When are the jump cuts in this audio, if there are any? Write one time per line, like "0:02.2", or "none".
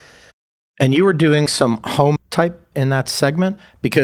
0:01.5
0:02.2
0:02.7